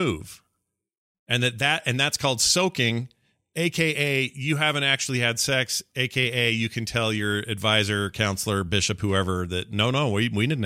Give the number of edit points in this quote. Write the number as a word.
zero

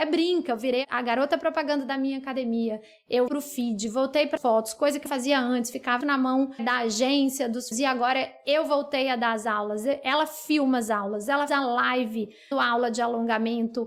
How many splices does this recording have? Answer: eight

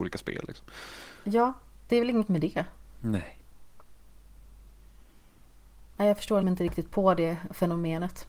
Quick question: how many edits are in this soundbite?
four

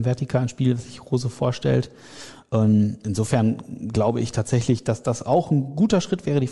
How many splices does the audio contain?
zero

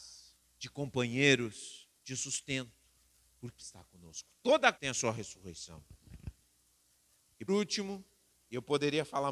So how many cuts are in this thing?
four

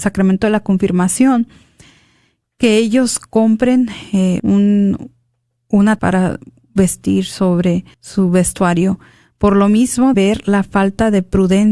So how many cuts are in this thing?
four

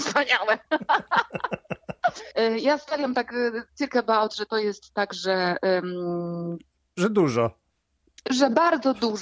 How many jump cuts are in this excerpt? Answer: zero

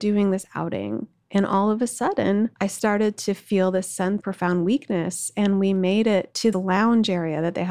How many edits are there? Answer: three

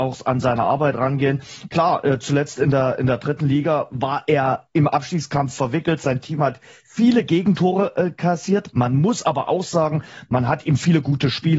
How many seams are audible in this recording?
zero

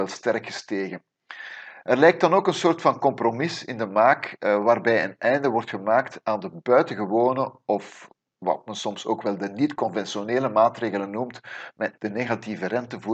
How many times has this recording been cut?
one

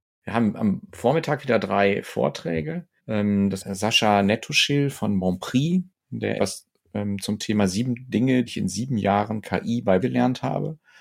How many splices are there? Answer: five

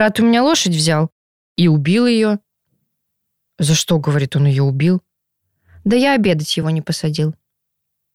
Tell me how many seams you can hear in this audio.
zero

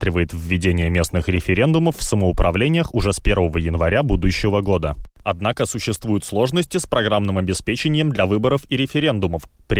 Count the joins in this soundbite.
zero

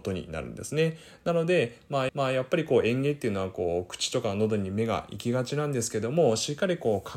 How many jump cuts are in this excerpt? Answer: one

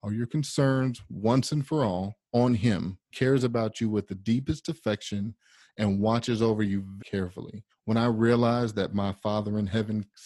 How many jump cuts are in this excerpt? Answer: four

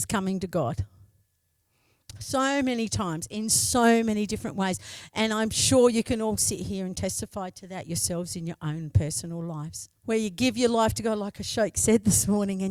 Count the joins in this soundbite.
one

